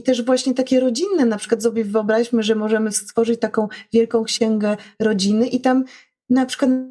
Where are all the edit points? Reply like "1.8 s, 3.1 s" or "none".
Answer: none